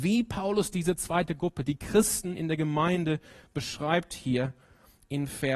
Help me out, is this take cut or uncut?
uncut